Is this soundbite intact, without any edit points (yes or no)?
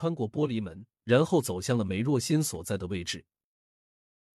no